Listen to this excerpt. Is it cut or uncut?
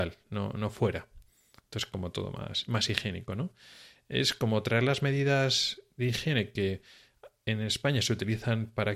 uncut